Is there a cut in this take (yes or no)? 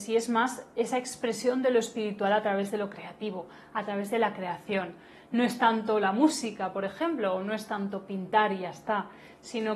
no